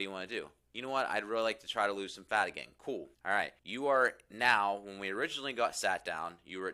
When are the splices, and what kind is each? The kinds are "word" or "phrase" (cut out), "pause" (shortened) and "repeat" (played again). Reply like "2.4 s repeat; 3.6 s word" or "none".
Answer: 3.1 s pause; 3.6 s pause

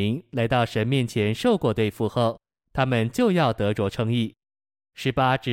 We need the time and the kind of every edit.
none

